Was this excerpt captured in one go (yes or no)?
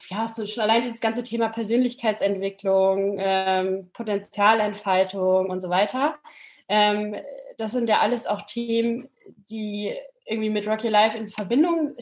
yes